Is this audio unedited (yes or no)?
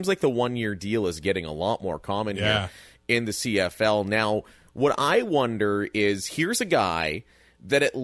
yes